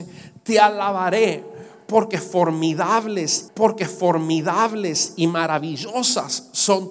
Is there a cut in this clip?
yes; 1 cut; at 3.5 s

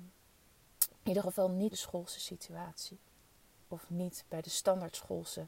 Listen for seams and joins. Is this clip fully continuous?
no; 1 cut; at 1.7 s

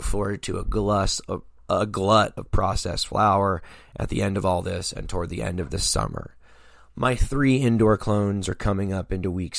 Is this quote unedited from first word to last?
yes; 0 cuts

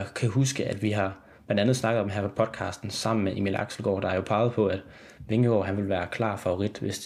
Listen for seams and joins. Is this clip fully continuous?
yes; 0 cuts

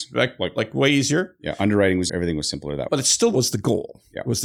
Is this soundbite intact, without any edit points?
no; 2 cuts; at 2.1 s, 2.9 s

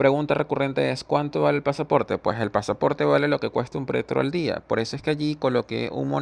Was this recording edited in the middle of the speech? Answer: no; 0 cuts

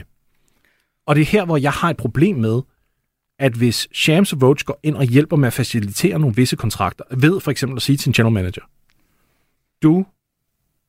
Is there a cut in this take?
no; 0 cuts

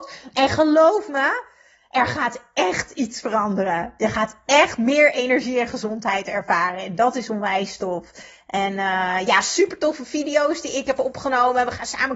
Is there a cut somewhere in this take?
no; 0 cuts

